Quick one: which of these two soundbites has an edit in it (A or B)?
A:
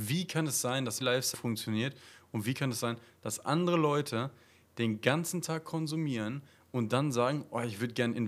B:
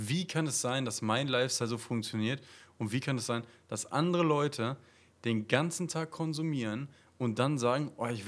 A